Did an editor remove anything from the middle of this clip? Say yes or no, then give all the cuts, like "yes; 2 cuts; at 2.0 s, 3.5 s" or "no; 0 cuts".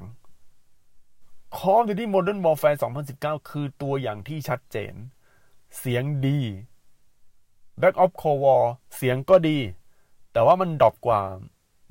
no; 0 cuts